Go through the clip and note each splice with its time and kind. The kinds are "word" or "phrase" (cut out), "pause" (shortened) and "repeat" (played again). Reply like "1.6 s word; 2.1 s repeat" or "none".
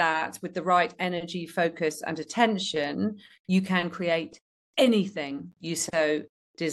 none